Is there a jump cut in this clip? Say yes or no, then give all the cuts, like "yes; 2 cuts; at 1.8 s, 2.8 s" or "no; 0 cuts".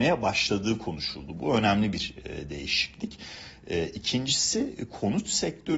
no; 0 cuts